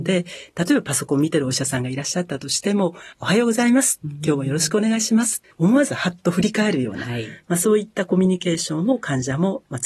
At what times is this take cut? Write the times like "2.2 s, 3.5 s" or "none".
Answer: 3.1 s, 5.5 s